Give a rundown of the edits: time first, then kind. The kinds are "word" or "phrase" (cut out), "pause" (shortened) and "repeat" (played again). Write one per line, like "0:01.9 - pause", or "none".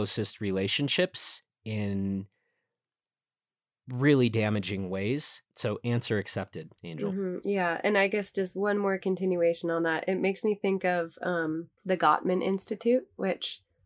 0:05.5 - pause
0:06.8 - pause
0:11.8 - pause